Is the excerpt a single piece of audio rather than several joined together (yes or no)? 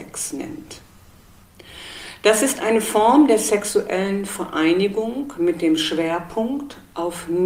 yes